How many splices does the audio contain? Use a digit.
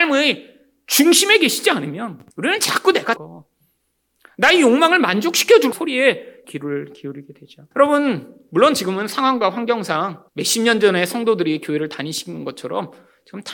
6